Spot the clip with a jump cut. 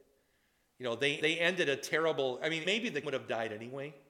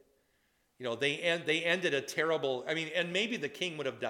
first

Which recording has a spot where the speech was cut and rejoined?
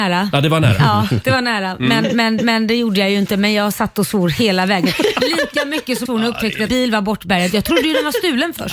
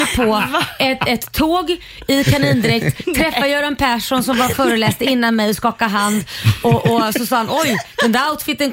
first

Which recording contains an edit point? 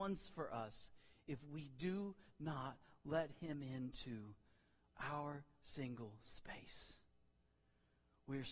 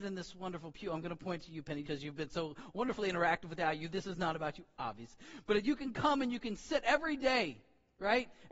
second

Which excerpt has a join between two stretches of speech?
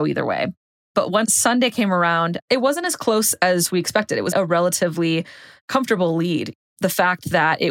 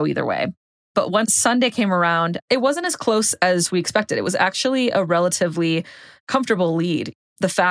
first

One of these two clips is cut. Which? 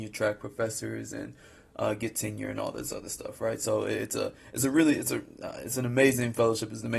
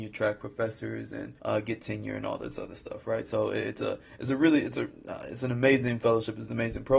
second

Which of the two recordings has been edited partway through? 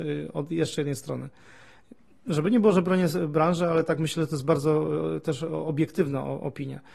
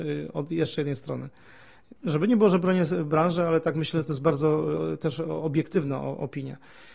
second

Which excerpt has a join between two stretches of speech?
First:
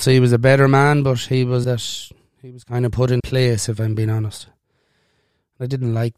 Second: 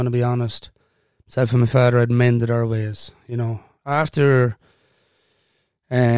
first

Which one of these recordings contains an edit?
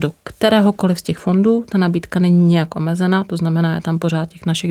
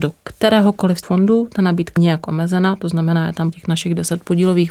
second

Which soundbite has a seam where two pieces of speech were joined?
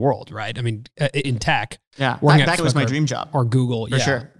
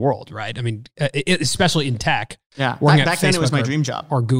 first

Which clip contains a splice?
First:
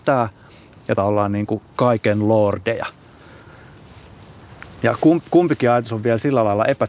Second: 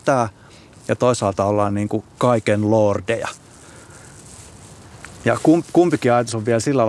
first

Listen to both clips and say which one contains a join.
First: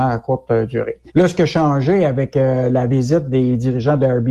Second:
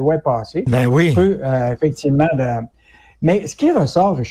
first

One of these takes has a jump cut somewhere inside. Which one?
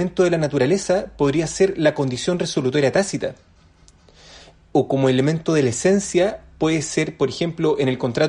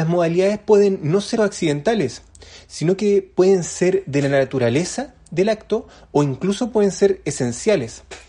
second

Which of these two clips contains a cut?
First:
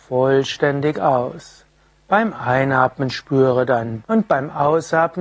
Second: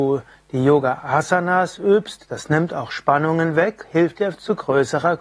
first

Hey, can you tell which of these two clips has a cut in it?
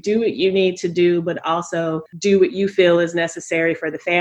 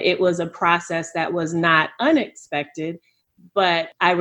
first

